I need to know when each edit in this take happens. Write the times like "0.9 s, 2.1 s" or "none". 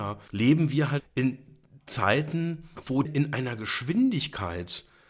1.0 s, 3.1 s